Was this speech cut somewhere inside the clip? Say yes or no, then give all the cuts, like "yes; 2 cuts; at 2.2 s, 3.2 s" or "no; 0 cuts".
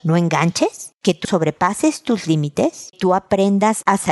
yes; 2 cuts; at 1.2 s, 2.9 s